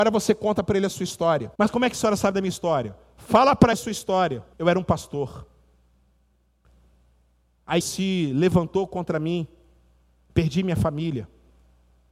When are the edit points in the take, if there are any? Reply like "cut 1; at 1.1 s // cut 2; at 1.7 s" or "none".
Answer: cut 1; at 1.5 s // cut 2; at 3.7 s // cut 3; at 4.5 s // cut 4; at 7.8 s